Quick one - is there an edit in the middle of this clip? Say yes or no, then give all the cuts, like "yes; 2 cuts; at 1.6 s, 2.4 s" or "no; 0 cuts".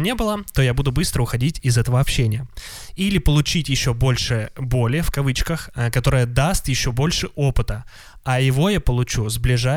no; 0 cuts